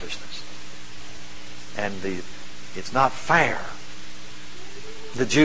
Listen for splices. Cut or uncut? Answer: uncut